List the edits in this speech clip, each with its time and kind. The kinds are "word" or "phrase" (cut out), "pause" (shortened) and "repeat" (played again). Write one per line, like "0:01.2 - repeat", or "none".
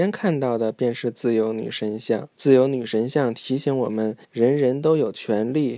0:02.3 - pause
0:04.2 - pause